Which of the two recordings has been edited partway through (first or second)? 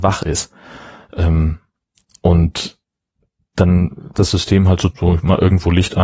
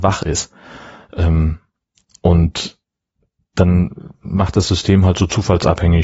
first